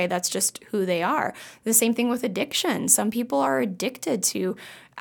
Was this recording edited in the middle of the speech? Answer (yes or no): no